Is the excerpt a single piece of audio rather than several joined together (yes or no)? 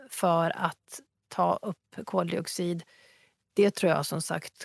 yes